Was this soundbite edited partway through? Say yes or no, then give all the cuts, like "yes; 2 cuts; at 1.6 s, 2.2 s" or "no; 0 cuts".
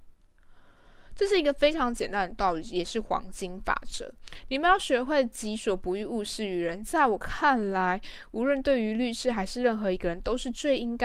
no; 0 cuts